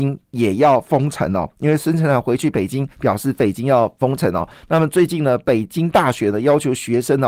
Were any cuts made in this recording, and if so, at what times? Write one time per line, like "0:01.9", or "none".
0:02.9